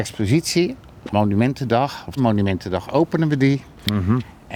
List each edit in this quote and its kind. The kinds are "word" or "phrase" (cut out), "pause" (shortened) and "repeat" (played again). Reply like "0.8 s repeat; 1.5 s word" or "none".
1.1 s word; 2.2 s phrase